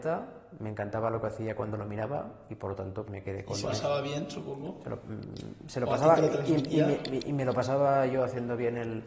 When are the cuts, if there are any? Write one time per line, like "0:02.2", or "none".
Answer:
0:03.1
0:03.6